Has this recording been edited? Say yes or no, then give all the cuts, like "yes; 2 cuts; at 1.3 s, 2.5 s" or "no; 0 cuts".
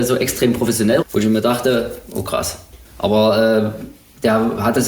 yes; 2 cuts; at 1.0 s, 2.9 s